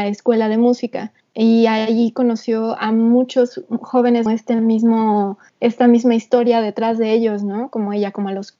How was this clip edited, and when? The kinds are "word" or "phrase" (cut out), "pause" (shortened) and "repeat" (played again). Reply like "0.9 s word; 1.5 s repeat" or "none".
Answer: 1.2 s pause; 4.3 s phrase; 5.5 s pause